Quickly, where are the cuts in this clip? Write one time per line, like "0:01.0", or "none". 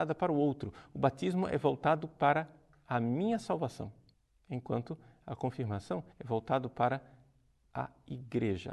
0:04.1
0:06.1